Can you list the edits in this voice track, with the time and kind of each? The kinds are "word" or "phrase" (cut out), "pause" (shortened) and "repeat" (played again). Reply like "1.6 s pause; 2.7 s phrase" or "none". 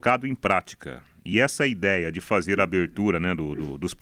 none